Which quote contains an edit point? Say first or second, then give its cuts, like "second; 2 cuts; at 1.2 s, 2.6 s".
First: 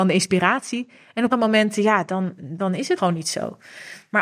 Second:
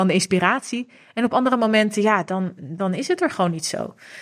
first; 2 cuts; at 1.3 s, 3.0 s